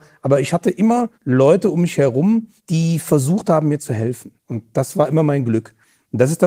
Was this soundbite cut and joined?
yes; 3 cuts; at 1.1 s, 2.6 s, 4.4 s

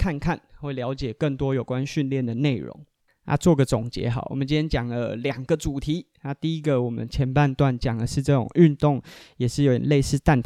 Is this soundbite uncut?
yes; 0 cuts

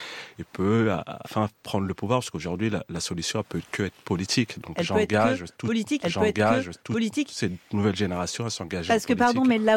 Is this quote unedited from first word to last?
no; 2 cuts; at 1.2 s, 6.0 s

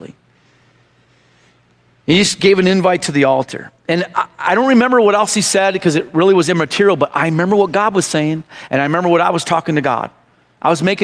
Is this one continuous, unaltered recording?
yes; 0 cuts

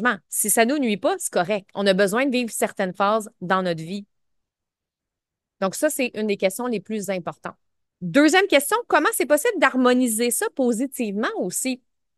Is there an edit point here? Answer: no; 0 cuts

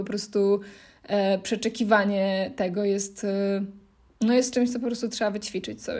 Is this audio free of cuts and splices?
yes; 0 cuts

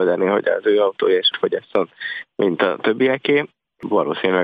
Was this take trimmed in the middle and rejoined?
yes; 1 cut; at 1.3 s

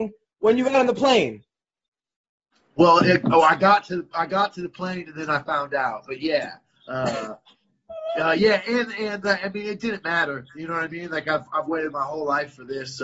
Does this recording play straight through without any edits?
yes; 0 cuts

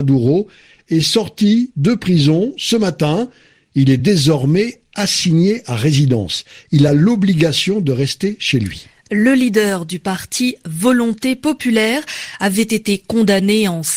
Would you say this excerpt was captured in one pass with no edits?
yes; 0 cuts

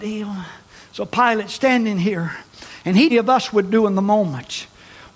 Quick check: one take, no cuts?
no; 1 cut; at 3.1 s

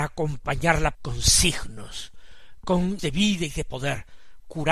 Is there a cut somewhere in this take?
yes; 2 cuts; at 0.9 s, 3.0 s

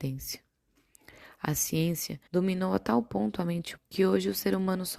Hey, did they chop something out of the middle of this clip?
yes; 2 cuts; at 2.3 s, 3.8 s

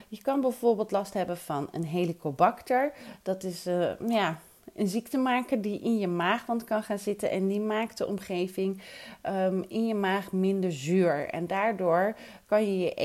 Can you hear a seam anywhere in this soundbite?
no; 0 cuts

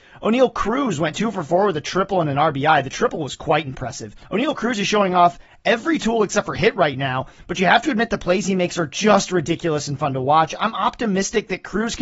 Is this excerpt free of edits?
yes; 0 cuts

